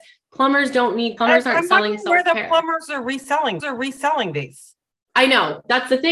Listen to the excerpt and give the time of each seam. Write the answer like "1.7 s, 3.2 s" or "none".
1.2 s, 3.6 s